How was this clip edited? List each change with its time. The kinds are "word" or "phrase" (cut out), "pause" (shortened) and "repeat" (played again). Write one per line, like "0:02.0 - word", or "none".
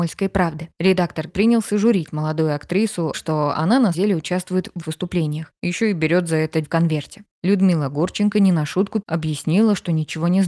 0:01.3 - word
0:03.1 - word
0:03.9 - word
0:04.8 - word
0:06.6 - word
0:09.0 - word